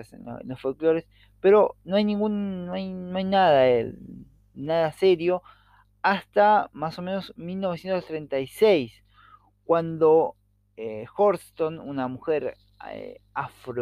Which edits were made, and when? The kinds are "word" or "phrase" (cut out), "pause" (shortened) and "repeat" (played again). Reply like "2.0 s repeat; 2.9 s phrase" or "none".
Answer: none